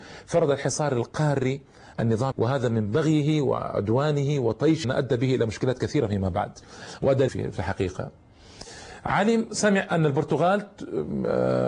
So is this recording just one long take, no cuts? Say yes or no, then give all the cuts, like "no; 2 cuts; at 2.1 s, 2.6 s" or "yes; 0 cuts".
no; 4 cuts; at 1.9 s, 2.3 s, 4.8 s, 7.3 s